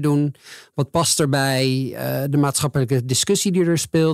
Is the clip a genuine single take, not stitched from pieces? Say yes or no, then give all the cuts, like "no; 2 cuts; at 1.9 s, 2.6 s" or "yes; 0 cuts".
yes; 0 cuts